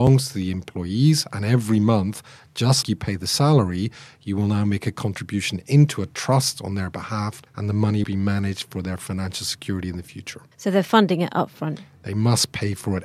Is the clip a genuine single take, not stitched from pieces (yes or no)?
no